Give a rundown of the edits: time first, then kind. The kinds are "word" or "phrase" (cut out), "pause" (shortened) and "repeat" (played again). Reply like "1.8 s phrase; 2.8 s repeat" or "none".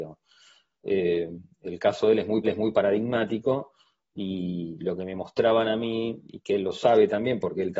2.4 s repeat